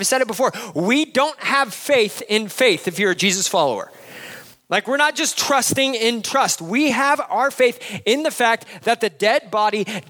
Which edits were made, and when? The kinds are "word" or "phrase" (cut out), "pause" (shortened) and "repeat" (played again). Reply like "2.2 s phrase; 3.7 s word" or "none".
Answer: none